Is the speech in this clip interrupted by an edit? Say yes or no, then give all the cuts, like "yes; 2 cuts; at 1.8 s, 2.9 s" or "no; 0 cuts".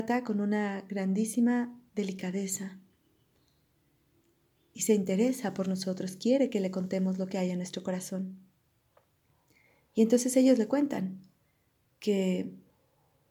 no; 0 cuts